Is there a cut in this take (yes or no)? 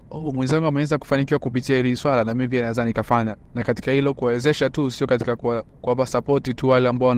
no